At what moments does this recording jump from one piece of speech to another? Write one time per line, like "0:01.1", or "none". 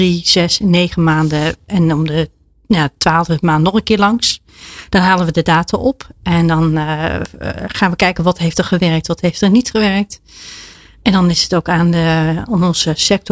none